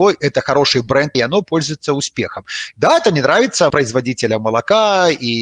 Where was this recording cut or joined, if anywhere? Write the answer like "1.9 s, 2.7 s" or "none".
1.1 s, 3.7 s